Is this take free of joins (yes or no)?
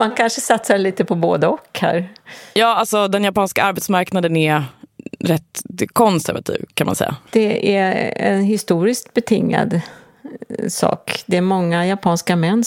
yes